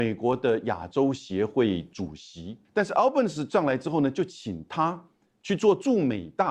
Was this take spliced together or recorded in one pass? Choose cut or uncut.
uncut